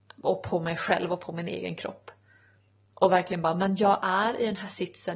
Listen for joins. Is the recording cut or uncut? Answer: uncut